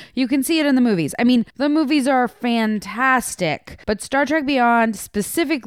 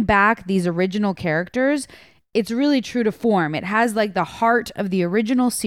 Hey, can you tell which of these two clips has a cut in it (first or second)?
first